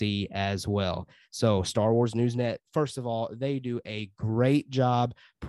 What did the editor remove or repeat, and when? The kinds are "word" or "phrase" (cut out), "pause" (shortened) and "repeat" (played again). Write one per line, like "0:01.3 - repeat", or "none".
none